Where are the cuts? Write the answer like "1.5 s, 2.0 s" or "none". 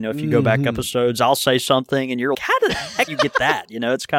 2.3 s, 3.1 s